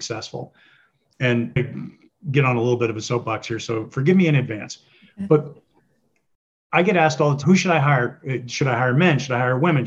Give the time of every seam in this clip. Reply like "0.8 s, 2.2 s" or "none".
7.4 s